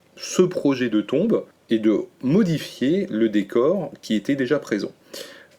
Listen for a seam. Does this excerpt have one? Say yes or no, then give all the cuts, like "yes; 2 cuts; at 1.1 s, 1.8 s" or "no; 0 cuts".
yes; 1 cut; at 1.5 s